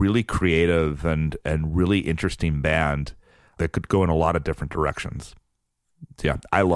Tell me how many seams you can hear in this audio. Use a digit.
0